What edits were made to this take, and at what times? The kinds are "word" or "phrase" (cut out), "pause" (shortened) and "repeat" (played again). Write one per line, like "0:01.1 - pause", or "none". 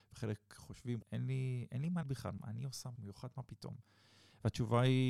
0:01.0 - word
0:02.0 - word
0:02.4 - word
0:03.0 - word